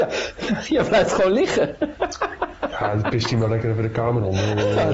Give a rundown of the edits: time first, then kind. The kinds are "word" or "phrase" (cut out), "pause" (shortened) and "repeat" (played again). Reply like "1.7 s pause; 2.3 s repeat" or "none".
none